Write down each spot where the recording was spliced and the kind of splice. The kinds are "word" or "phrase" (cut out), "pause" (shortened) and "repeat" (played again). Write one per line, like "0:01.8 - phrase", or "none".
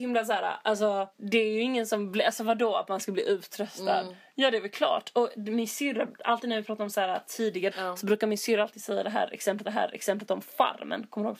0:01.1 - pause
0:07.7 - word
0:09.6 - repeat